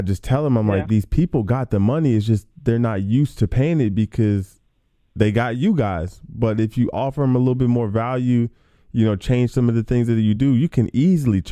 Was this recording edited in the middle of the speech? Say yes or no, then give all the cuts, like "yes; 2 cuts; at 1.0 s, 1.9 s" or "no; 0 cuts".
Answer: no; 0 cuts